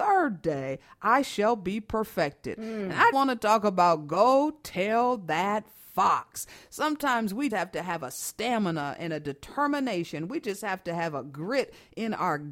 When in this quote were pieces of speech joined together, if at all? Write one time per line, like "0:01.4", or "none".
0:03.1
0:07.5